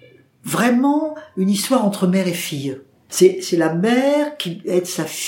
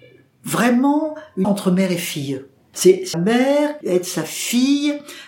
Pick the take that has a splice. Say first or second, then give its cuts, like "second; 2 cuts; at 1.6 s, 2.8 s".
second; 3 cuts; at 1.4 s, 3.1 s, 3.8 s